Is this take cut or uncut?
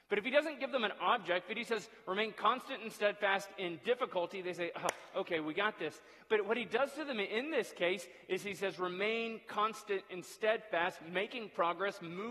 uncut